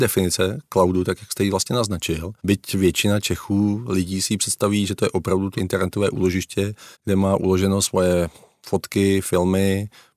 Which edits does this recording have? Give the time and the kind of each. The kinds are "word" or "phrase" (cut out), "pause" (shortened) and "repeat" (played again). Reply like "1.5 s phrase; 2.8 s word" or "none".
2.4 s pause; 5.6 s word; 6.9 s pause

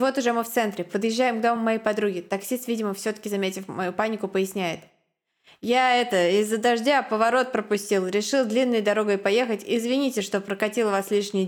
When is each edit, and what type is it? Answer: none

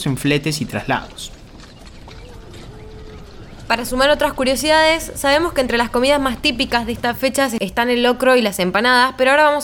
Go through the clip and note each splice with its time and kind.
none

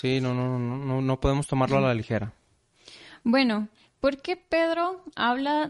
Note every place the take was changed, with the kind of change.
none

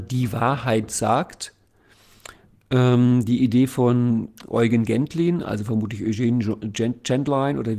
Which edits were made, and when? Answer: none

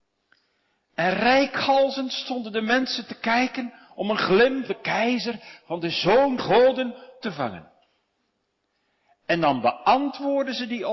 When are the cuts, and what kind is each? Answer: 4.7 s word; 6.4 s word; 7.2 s word

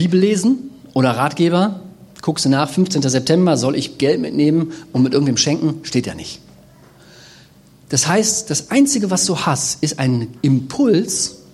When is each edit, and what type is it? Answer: none

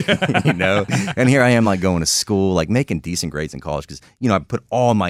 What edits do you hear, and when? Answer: none

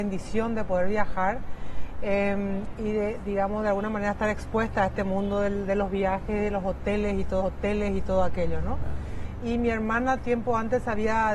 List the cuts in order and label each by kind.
7.4 s repeat

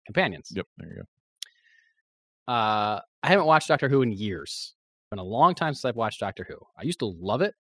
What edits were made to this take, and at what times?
3.1 s pause

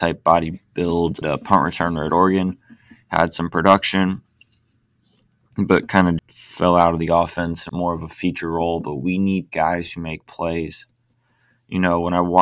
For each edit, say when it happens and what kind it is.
1.2 s word; 6.2 s word; 7.7 s word

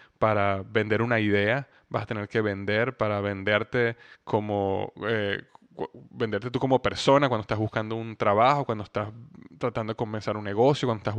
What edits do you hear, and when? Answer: none

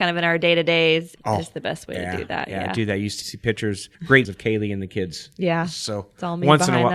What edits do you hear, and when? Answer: 1.2 s word; 3.2 s word; 3.9 s pause; 4.2 s word

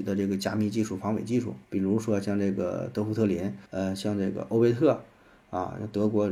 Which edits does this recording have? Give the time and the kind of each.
1.6 s pause; 3.7 s pause

